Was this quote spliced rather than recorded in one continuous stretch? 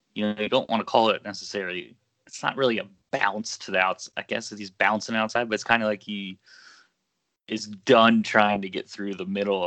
no; 0 cuts

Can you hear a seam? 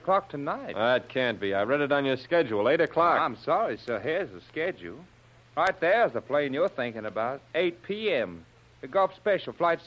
no; 0 cuts

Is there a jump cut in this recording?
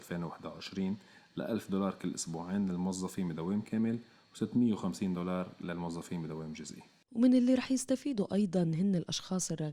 no; 0 cuts

